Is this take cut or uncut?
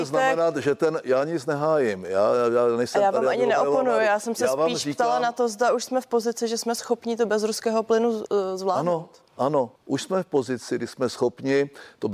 cut